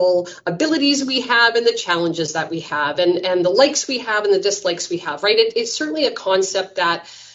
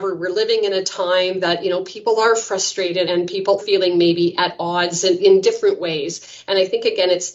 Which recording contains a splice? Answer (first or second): second